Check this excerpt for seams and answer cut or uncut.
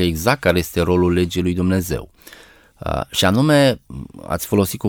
uncut